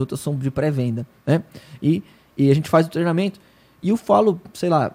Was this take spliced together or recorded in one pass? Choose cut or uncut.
uncut